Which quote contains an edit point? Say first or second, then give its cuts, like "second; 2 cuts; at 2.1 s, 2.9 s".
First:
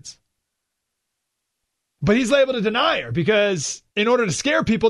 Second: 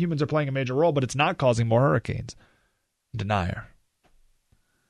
first; 1 cut; at 3.9 s